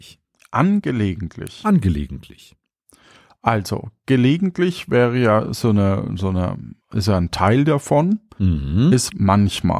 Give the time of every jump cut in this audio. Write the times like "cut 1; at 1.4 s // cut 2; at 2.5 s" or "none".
cut 1; at 6.8 s